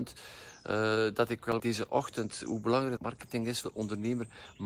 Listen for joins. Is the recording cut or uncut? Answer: cut